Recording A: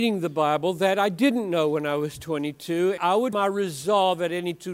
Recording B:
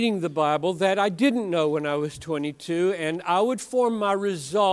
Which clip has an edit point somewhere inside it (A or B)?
A